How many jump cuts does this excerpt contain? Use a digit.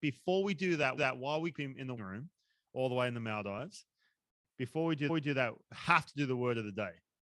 4